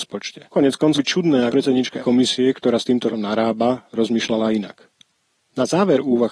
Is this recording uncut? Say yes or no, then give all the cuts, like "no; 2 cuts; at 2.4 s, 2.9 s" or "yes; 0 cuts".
no; 4 cuts; at 0.9 s, 1.5 s, 2.0 s, 3.1 s